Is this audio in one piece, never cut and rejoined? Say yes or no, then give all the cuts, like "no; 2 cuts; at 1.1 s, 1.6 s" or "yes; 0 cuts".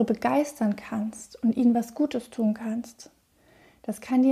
yes; 0 cuts